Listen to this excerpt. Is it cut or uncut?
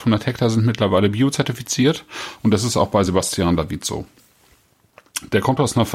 uncut